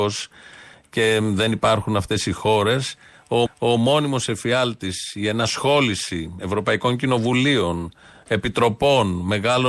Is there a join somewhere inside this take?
yes; 1 cut; at 3.5 s

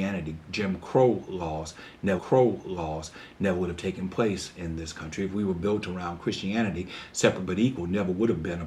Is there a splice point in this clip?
yes; 1 cut; at 2.2 s

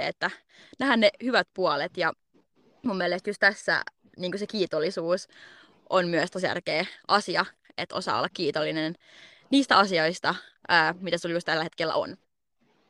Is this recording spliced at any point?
no; 0 cuts

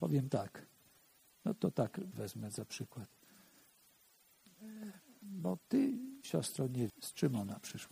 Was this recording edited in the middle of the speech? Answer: yes; 3 cuts; at 2.1 s, 5.0 s, 6.9 s

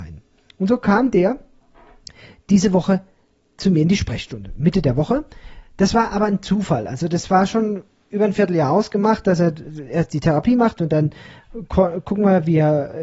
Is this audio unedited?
yes; 0 cuts

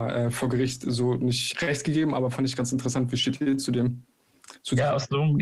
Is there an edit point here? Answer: yes; 1 cut; at 1.5 s

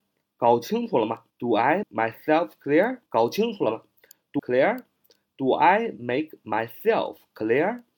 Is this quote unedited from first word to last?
no; 4 cuts; at 1.3 s, 1.8 s, 3.1 s, 4.4 s

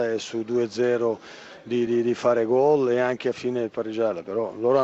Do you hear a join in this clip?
yes; 1 cut; at 1.9 s

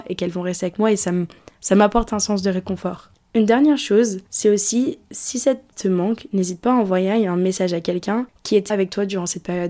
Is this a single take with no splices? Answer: no; 4 cuts; at 4.3 s, 5.0 s, 5.7 s, 8.7 s

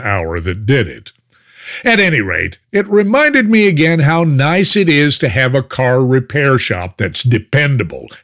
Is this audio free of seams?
yes; 0 cuts

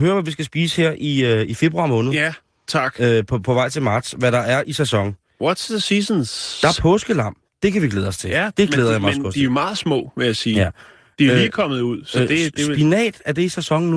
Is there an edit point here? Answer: no; 0 cuts

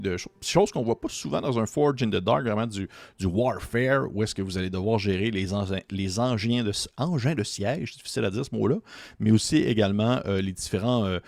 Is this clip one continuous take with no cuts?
yes; 0 cuts

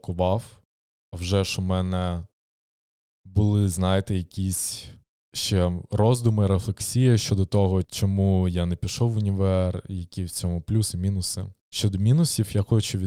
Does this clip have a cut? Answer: no; 0 cuts

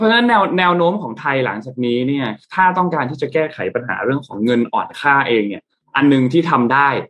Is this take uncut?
yes; 0 cuts

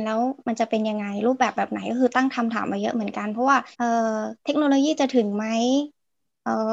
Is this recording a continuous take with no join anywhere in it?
no; 2 cuts; at 3.7 s, 4.4 s

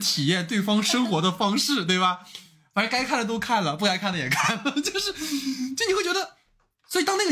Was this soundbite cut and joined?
no; 0 cuts

